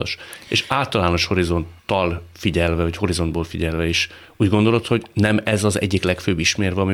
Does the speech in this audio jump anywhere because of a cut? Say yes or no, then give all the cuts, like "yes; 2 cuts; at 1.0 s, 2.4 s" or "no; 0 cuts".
yes; 1 cut; at 1.8 s